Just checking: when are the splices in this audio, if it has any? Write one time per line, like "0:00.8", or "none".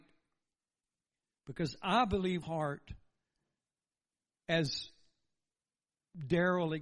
0:02.4